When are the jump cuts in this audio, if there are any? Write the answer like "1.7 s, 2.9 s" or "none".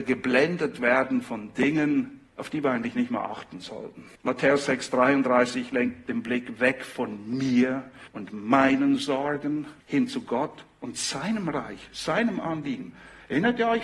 2.3 s, 4.1 s, 8.1 s, 9.8 s